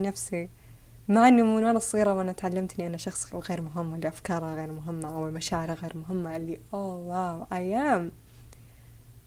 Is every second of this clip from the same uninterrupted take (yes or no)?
no